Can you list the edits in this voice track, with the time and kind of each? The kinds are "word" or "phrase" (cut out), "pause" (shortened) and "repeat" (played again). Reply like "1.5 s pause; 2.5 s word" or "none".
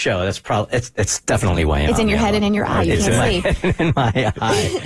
none